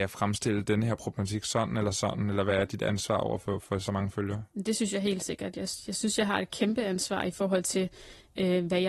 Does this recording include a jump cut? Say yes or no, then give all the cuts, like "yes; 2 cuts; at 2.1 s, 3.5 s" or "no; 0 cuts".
no; 0 cuts